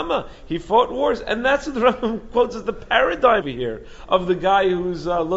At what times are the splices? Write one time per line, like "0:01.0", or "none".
0:03.4